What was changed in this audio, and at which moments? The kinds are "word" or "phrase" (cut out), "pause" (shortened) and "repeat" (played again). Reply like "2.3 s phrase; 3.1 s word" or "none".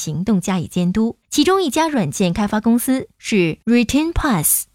1.2 s pause

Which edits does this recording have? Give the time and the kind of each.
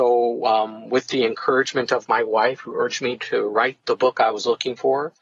none

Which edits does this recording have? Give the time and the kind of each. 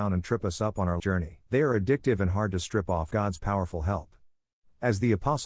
1.0 s word; 1.5 s pause; 3.1 s word

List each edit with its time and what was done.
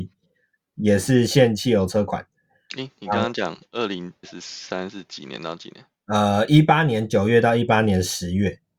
4.2 s word

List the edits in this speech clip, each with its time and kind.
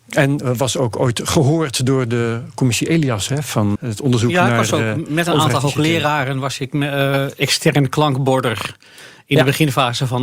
3.8 s word

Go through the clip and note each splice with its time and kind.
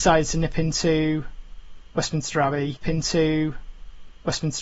2.8 s repeat

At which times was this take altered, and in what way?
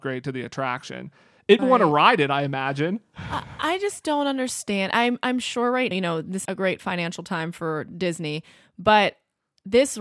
1.6 s phrase; 5.9 s word; 6.4 s word

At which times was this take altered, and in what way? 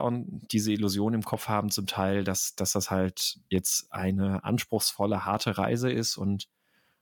none

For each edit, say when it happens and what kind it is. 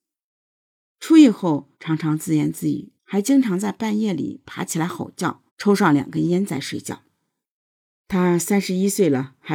1.7 s pause; 3.0 s pause; 5.5 s pause; 7.4 s pause

